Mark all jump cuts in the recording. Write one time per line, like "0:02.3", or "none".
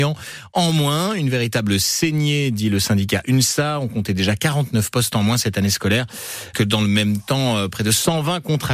0:06.5